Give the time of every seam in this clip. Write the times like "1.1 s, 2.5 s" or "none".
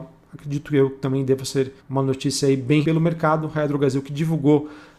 1.8 s, 2.8 s